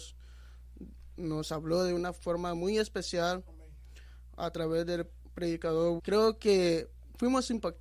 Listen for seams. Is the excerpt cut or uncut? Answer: cut